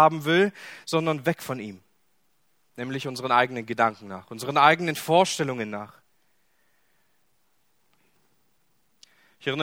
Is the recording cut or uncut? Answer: uncut